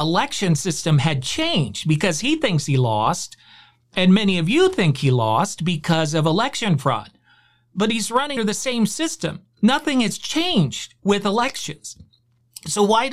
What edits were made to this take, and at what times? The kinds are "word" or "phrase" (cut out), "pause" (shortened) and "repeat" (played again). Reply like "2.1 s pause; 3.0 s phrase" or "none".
8.4 s word